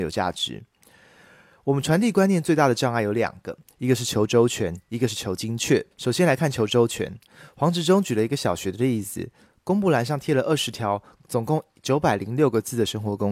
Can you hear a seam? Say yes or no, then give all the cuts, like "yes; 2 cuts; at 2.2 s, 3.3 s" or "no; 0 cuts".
yes; 1 cut; at 5.9 s